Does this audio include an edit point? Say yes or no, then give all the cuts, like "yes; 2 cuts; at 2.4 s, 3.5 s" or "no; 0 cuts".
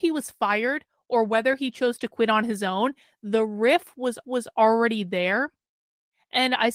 yes; 1 cut; at 4.2 s